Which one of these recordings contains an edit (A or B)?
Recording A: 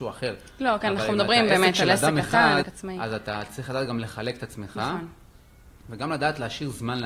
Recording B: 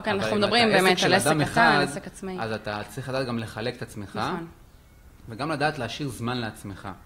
A